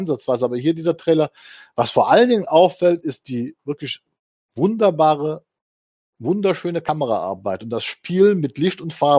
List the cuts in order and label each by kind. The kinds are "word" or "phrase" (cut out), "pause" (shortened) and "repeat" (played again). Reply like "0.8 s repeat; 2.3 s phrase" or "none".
none